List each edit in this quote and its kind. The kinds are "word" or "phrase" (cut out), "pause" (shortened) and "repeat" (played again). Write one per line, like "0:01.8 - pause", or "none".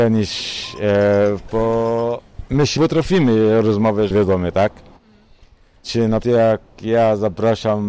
0:01.5 - word
0:02.8 - word
0:04.1 - word
0:06.2 - word